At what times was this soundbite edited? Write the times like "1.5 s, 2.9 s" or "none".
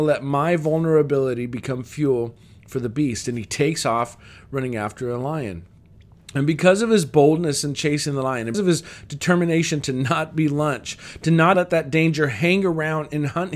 8.5 s, 11.5 s